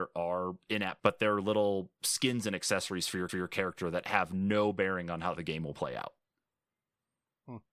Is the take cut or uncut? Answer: cut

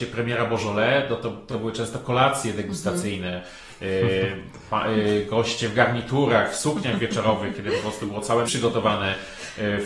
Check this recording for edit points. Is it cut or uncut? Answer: cut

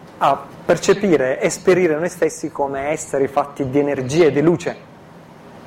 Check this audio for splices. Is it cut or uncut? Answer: uncut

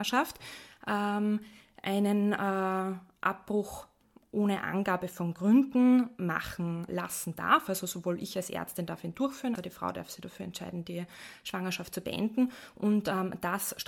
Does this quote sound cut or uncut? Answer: cut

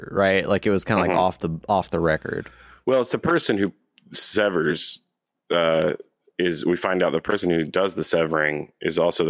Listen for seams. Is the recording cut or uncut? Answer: uncut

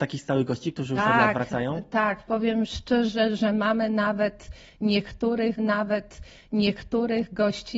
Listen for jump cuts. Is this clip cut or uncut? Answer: cut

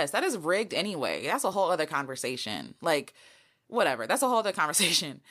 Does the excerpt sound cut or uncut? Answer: uncut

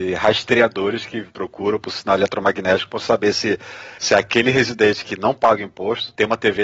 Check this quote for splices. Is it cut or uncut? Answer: uncut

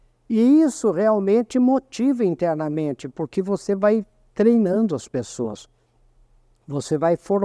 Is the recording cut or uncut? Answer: uncut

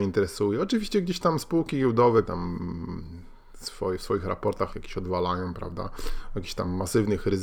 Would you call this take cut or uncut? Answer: cut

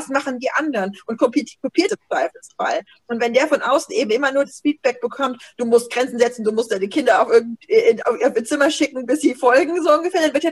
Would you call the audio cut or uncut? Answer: cut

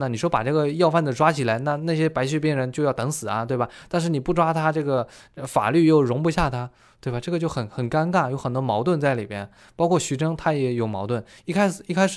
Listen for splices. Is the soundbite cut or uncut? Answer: uncut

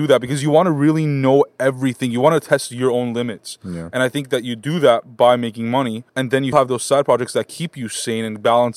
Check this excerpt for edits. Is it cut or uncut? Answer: cut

